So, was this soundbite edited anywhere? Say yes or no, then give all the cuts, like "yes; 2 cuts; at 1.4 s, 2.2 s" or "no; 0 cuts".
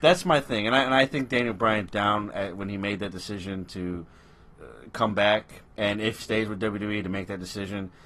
yes; 4 cuts; at 1.9 s, 4.5 s, 5.7 s, 6.2 s